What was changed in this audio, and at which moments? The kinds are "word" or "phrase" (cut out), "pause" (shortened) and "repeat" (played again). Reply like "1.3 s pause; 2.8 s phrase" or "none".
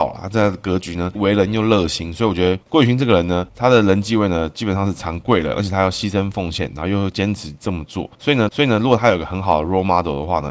1.2 s word; 8.5 s repeat